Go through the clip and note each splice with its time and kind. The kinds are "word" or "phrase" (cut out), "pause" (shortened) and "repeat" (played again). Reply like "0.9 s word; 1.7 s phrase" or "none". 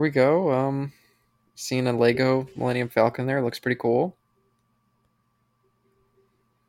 none